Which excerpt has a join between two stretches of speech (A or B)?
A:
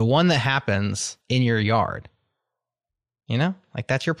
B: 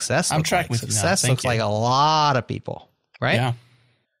A